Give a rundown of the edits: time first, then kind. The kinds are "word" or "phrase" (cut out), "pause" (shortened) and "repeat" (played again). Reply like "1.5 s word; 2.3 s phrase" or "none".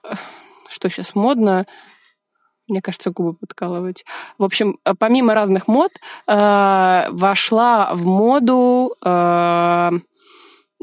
none

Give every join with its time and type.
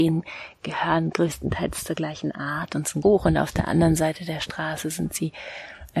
3.0 s word

